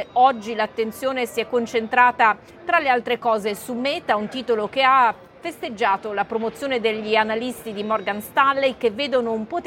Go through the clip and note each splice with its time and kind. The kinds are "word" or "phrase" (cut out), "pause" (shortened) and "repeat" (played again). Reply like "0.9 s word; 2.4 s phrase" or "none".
none